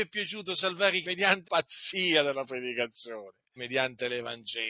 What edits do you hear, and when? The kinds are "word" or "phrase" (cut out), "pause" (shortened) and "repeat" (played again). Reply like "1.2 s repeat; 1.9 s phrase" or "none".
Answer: 1.0 s word; 1.4 s word; 3.6 s word